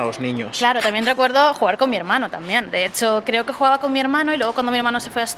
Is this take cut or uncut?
uncut